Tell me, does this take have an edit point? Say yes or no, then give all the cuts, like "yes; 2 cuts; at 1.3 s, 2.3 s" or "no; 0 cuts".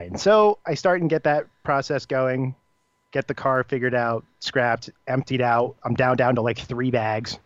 no; 0 cuts